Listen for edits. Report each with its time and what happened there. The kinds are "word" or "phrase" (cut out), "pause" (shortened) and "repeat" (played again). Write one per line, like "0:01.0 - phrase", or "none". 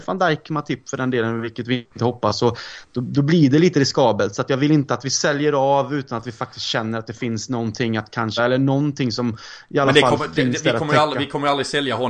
0:08.4 - word

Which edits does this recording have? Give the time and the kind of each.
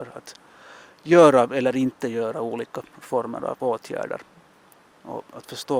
none

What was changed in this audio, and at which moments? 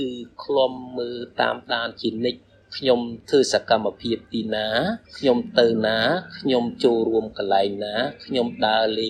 0:02.6 - pause
0:05.1 - pause

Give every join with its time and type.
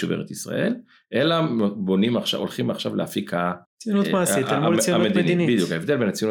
0:03.6 - pause

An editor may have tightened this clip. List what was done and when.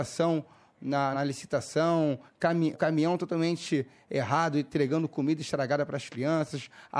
0:01.1 - word
0:02.7 - word

